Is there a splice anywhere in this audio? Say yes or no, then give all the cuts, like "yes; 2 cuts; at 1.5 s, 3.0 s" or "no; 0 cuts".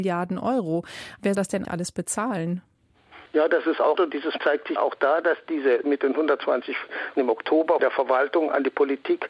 yes; 8 cuts; at 1.3 s, 1.6 s, 3.9 s, 4.4 s, 4.8 s, 5.8 s, 7.2 s, 7.8 s